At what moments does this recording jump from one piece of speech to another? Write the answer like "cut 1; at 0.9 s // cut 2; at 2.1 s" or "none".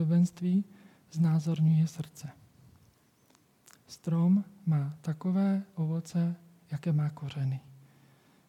none